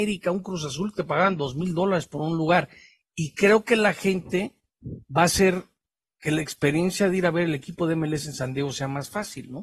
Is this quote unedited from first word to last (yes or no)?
yes